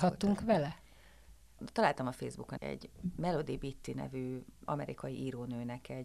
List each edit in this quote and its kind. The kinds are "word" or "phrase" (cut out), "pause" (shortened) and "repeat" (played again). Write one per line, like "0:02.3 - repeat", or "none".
0:02.6 - word
0:04.7 - word